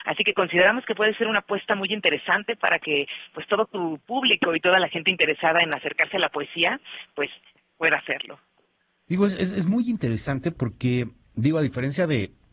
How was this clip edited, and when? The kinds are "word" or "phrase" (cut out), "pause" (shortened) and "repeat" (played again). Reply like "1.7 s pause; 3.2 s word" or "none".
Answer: none